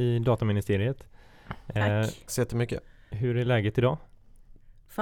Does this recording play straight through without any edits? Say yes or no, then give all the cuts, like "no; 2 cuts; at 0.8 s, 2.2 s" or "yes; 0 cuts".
no; 1 cut; at 2.3 s